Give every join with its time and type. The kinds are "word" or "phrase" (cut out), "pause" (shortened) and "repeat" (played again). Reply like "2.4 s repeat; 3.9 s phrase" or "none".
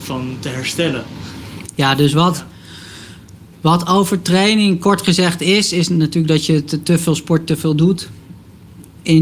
none